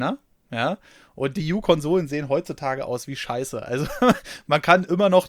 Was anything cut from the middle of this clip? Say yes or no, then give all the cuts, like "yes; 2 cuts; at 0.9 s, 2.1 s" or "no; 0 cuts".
yes; 1 cut; at 1.4 s